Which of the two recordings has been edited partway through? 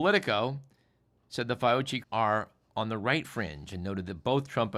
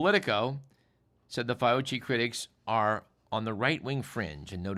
first; 2 cuts; at 2.0 s, 3.2 s

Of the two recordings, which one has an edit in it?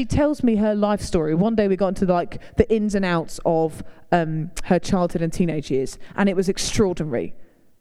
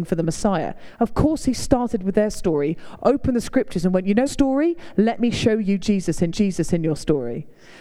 second; 3 cuts; at 3.0 s, 4.3 s, 6.3 s

